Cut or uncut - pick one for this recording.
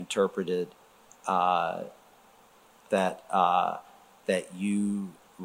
cut